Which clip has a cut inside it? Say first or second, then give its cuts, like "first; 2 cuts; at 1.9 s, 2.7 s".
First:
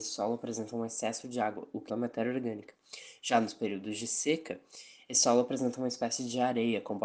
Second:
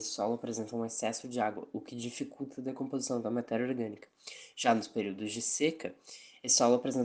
first; 1 cut; at 1.9 s